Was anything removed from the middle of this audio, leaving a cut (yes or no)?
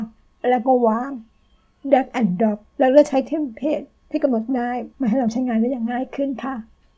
yes